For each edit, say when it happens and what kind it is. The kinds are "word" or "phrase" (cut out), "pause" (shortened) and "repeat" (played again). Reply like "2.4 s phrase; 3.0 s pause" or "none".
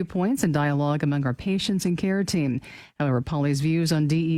none